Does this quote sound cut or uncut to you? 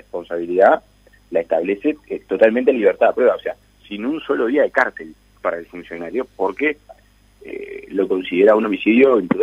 uncut